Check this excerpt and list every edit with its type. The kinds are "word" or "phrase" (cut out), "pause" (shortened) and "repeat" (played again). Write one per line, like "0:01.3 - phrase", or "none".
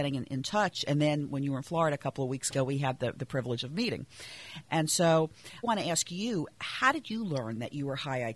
0:05.6 - word